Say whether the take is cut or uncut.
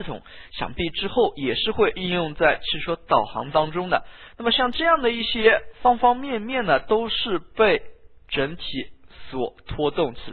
uncut